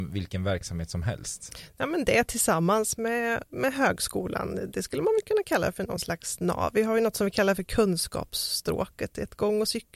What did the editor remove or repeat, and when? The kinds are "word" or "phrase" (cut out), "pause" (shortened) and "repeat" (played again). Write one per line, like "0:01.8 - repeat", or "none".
none